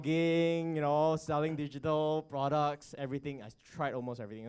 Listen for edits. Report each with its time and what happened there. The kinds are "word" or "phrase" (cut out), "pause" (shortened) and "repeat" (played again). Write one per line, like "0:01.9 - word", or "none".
none